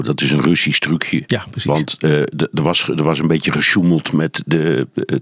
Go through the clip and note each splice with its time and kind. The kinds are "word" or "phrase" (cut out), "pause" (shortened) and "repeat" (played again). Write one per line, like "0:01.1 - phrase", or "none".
none